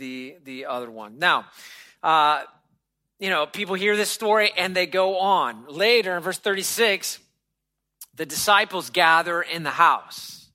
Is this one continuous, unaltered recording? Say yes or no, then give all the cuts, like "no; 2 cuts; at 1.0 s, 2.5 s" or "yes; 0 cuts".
yes; 0 cuts